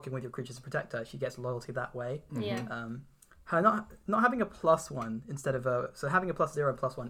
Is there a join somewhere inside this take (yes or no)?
no